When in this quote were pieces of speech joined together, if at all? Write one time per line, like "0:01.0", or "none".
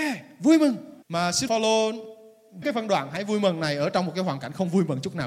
0:01.0
0:01.5
0:02.6